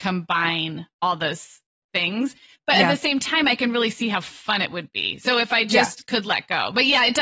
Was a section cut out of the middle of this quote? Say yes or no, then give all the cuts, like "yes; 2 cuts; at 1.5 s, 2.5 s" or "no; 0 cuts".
no; 0 cuts